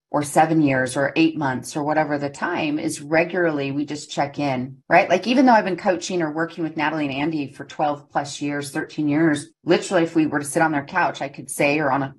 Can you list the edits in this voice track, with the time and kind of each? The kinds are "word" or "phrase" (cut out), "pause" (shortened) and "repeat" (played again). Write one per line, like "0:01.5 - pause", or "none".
0:04.8 - pause
0:09.5 - pause